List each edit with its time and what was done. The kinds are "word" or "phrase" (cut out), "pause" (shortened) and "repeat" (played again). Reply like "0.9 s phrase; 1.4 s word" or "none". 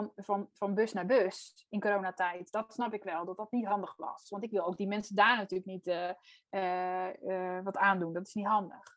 none

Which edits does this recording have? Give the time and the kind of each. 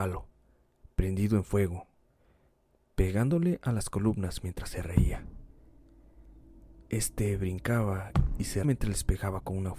8.6 s word

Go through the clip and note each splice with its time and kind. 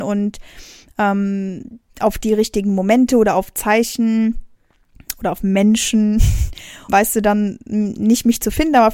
6.9 s word

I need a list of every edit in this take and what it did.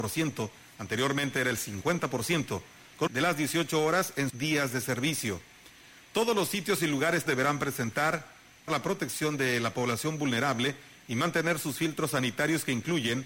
3.1 s phrase; 4.3 s word; 7.3 s word; 8.7 s word

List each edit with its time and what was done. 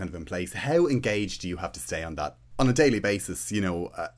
none

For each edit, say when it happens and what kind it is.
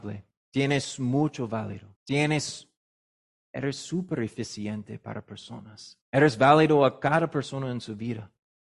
2.0 s pause; 6.0 s pause

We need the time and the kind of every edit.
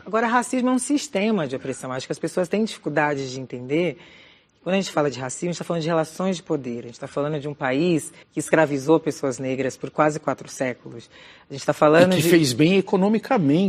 8.2 s pause

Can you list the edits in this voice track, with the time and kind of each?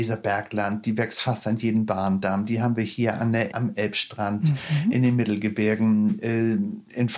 3.5 s word

